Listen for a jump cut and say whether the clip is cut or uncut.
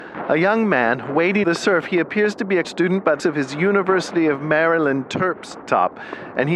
cut